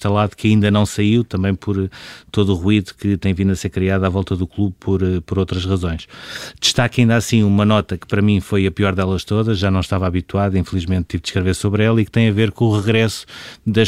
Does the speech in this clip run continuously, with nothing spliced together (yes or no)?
yes